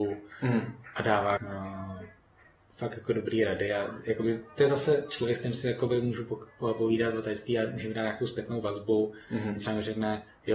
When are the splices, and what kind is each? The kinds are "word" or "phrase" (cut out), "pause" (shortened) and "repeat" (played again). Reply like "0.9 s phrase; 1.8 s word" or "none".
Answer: 1.4 s word